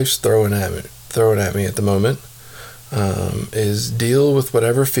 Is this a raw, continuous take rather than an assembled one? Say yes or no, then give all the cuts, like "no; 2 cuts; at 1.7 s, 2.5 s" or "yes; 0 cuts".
yes; 0 cuts